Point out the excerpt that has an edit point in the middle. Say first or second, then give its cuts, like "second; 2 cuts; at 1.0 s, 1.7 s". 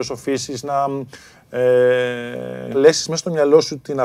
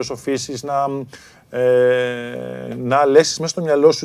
first; 1 cut; at 2.7 s